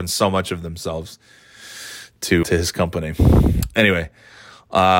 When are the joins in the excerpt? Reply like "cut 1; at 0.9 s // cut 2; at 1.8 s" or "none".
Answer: cut 1; at 2.4 s